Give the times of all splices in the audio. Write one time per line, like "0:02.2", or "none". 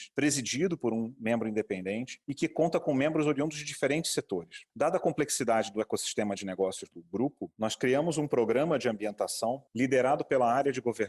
none